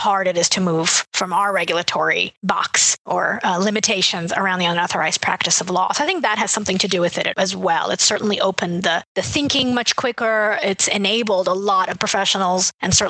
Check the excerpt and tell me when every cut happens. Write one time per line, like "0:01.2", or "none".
0:11.9